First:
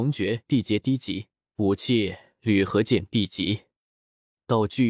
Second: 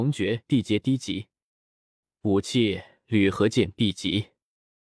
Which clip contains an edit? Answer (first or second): first